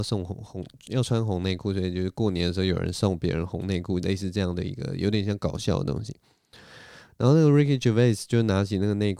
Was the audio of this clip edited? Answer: no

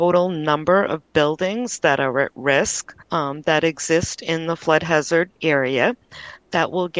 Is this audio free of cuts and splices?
no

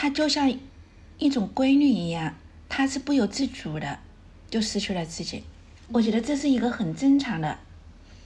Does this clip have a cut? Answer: yes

